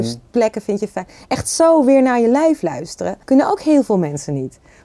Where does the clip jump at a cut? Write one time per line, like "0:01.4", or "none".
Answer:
0:03.2